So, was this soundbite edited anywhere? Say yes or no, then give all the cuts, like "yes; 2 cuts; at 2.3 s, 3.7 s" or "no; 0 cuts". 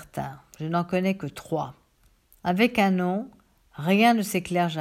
no; 0 cuts